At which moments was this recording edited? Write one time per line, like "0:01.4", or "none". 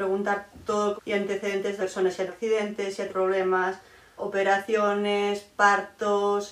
0:01.0
0:01.8
0:02.3
0:03.1
0:04.2